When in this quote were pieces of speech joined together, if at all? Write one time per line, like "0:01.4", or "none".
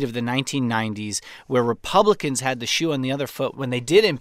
none